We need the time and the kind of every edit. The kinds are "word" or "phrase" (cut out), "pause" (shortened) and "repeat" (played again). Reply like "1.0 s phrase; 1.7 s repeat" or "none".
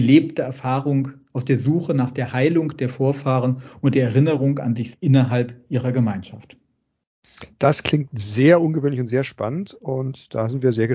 4.9 s word